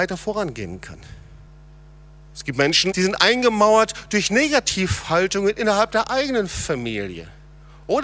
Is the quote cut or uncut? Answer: cut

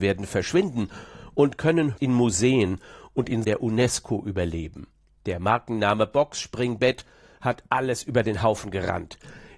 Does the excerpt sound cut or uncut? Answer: cut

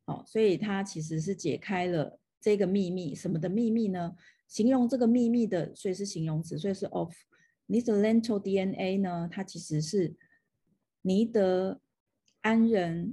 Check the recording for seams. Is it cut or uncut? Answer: uncut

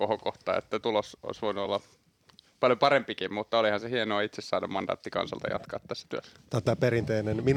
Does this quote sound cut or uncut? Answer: uncut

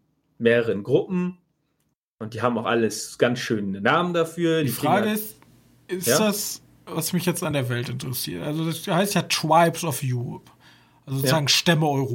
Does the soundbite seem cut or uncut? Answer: uncut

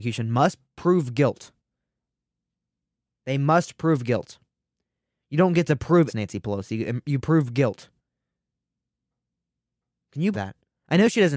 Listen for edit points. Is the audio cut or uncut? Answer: cut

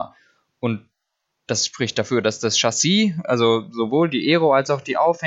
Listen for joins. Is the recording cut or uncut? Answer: uncut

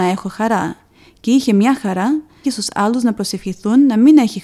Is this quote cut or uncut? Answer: cut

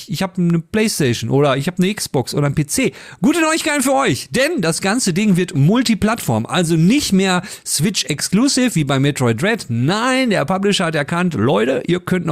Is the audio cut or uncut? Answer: uncut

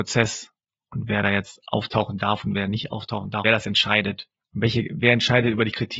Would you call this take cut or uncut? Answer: cut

